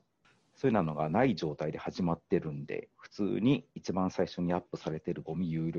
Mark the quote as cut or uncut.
cut